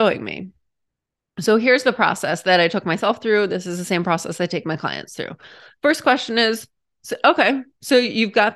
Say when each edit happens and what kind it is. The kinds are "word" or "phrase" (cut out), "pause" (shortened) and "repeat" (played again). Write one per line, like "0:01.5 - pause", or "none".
none